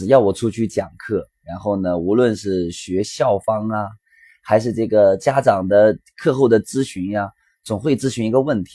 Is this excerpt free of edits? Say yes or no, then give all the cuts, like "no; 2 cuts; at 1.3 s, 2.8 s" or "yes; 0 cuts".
yes; 0 cuts